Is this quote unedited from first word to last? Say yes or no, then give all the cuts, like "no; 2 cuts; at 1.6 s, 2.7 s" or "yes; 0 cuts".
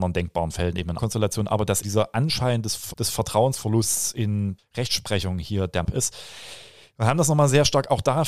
no; 5 cuts; at 1.0 s, 1.8 s, 2.9 s, 4.6 s, 5.8 s